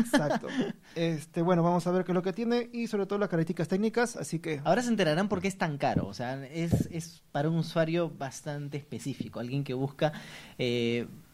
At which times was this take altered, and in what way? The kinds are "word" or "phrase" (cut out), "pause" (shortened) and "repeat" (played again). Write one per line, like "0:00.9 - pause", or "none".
none